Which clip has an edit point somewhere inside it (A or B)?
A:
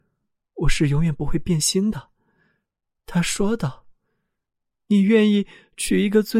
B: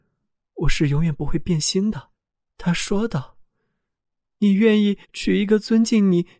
B